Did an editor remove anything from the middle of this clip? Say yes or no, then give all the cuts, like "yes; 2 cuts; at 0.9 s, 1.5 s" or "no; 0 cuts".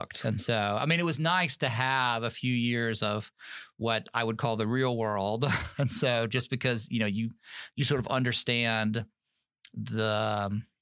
no; 0 cuts